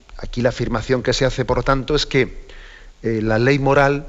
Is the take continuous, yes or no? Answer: yes